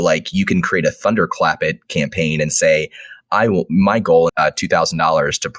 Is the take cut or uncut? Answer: cut